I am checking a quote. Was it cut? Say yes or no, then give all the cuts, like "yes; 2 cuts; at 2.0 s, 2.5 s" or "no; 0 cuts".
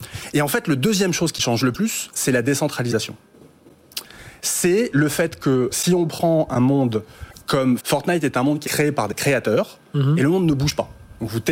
yes; 3 cuts; at 5.7 s, 7.8 s, 8.6 s